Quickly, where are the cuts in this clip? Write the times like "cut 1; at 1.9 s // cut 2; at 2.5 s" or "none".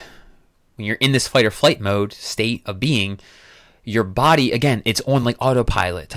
none